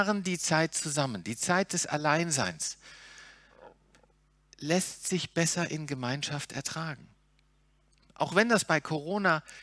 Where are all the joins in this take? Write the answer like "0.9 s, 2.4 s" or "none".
none